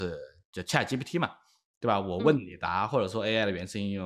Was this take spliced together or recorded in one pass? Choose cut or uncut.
uncut